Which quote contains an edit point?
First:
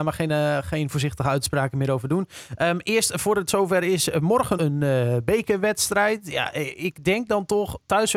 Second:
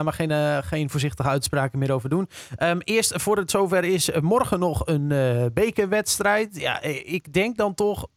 first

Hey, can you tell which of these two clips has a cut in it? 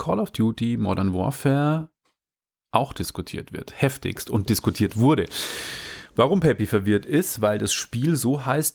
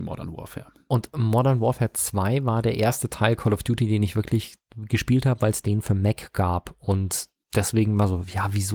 second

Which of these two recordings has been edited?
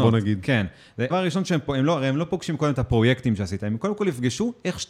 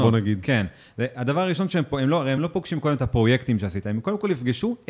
first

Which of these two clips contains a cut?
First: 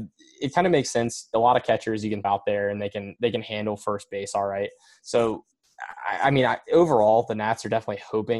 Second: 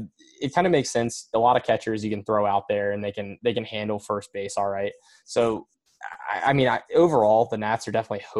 first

